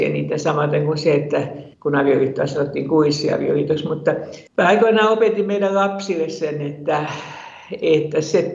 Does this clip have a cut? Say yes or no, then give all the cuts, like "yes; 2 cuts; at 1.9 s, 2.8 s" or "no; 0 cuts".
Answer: yes; 2 cuts; at 1.7 s, 4.5 s